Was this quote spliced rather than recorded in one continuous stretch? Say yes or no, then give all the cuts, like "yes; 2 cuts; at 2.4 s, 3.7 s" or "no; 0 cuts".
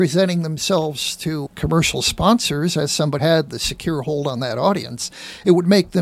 yes; 2 cuts; at 1.5 s, 3.2 s